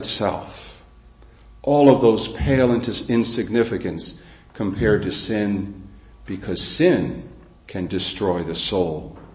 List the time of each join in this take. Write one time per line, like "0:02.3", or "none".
none